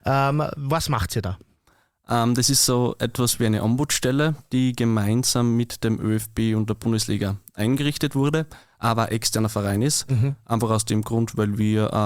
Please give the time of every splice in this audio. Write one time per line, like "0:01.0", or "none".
none